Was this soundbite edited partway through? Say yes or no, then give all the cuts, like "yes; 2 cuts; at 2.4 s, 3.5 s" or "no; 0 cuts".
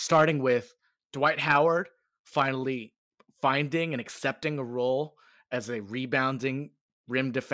no; 0 cuts